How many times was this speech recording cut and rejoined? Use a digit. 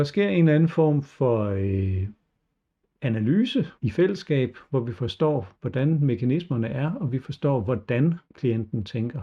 3